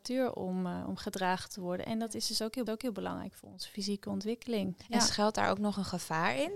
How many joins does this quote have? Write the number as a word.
one